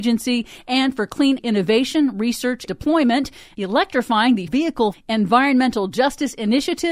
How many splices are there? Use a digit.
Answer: 4